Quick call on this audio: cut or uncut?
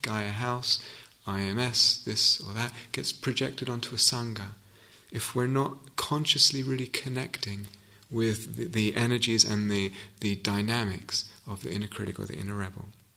uncut